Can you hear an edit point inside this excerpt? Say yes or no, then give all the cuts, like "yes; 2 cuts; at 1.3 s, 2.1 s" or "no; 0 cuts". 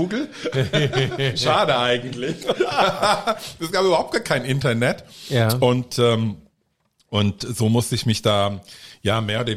no; 0 cuts